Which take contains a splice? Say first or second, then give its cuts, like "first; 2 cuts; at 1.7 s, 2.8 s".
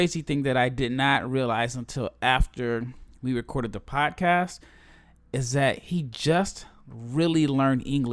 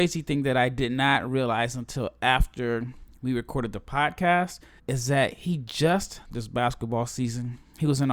second; 2 cuts; at 4.8 s, 6.2 s